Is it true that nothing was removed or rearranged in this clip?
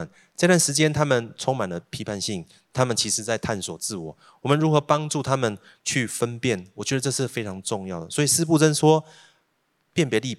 yes; 0 cuts

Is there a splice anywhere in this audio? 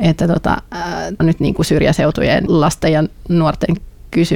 yes; 2 cuts; at 1.2 s, 2.5 s

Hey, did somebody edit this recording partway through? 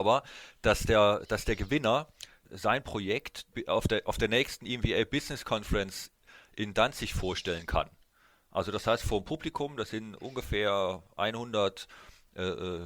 no; 0 cuts

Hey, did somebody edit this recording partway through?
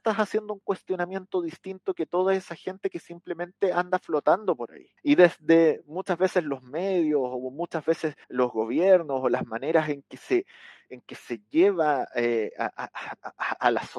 yes; 2 cuts; at 5.0 s, 8.2 s

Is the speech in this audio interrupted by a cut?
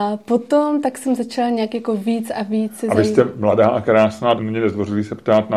yes; 1 cut; at 4.4 s

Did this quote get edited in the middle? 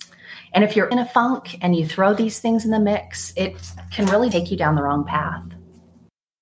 yes; 2 cuts; at 0.9 s, 4.3 s

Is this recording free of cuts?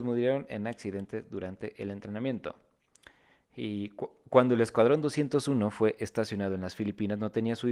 yes; 0 cuts

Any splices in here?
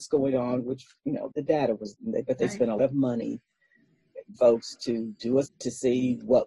yes; 5 cuts; at 1.3 s, 1.9 s, 2.8 s, 4.4 s, 5.5 s

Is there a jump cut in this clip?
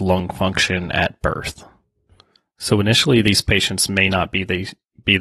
no; 0 cuts

